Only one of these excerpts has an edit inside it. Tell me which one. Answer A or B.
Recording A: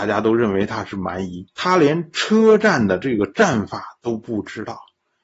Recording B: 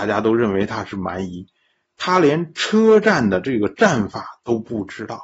A